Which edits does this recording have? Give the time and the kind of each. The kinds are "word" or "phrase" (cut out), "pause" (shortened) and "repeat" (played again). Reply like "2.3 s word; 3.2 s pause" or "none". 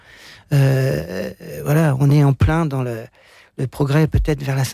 none